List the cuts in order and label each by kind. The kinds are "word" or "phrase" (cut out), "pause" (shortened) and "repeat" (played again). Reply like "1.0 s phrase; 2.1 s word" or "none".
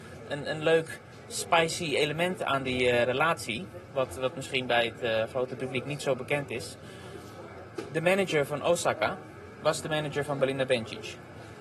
none